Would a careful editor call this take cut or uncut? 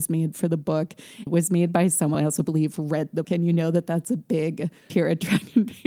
cut